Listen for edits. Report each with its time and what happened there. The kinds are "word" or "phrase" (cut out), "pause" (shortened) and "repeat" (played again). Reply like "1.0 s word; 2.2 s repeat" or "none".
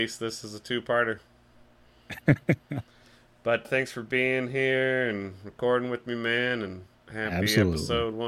2.9 s pause; 3.6 s word; 6.9 s pause

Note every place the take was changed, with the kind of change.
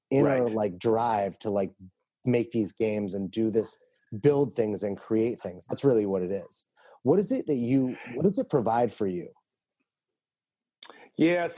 none

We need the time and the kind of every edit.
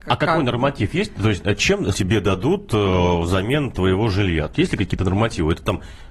1.9 s phrase; 4.6 s word

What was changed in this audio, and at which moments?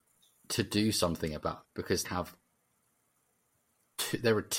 1.6 s word; 2.0 s word

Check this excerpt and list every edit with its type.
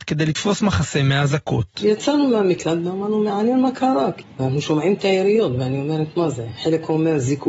none

